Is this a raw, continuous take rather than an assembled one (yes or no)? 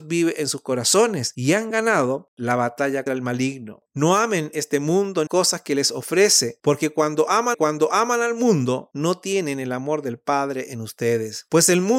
no